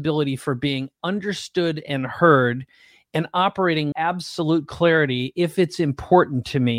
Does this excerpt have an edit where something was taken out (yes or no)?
yes